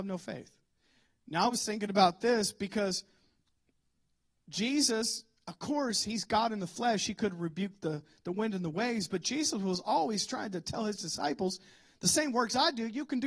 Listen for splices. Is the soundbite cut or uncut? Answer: uncut